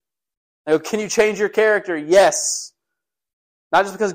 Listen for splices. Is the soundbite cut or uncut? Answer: uncut